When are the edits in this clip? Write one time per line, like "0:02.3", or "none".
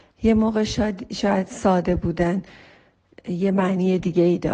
none

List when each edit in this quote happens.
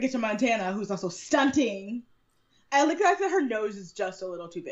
none

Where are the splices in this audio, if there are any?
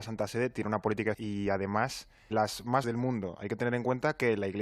0:01.1
0:02.3
0:02.8

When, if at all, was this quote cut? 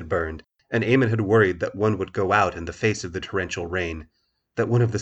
none

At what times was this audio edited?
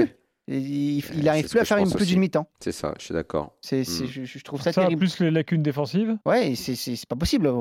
0:02.5
0:06.2

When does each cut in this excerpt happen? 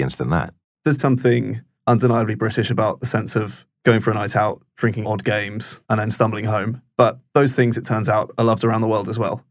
0:01.0
0:05.0
0:05.8

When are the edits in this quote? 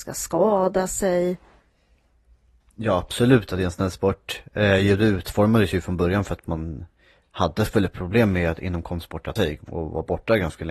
0:09.4

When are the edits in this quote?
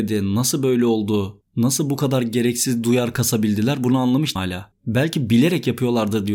0:04.4

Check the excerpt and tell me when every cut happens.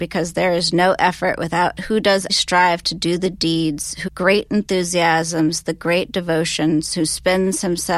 0:01.8
0:02.3
0:04.1

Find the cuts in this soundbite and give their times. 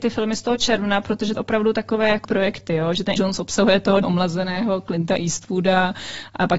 0:01.4
0:02.2
0:03.2
0:04.0

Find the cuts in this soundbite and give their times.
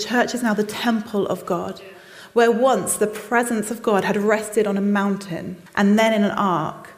0:05.7

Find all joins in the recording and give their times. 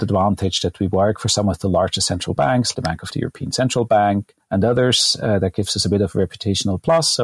0:02.7
0:03.1
0:04.4

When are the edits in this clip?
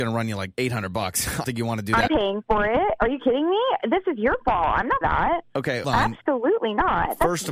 0:01.4
0:02.1
0:05.0
0:05.8

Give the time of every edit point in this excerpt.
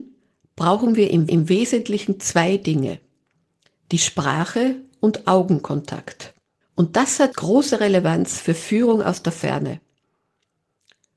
0:01.3
0:06.6
0:07.3

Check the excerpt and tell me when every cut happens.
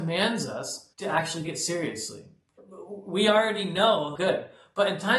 0:00.9
0:01.5
0:04.2

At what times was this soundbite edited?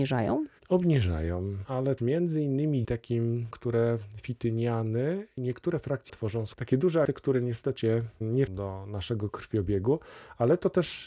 0:02.0
0:02.8
0:03.5
0:05.4
0:06.1
0:06.5
0:07.1
0:07.8
0:08.5

